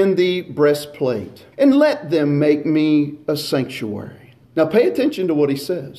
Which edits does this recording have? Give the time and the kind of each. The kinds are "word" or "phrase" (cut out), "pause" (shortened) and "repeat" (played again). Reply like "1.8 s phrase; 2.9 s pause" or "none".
1.5 s pause; 4.4 s pause